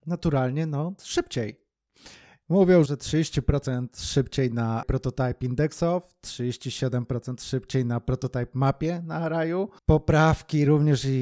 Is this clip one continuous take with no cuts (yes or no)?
no